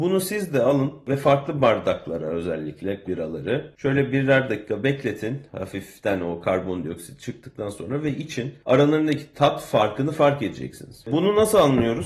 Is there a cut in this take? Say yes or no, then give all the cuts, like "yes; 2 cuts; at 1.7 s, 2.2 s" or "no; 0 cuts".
yes; 1 cut; at 3.1 s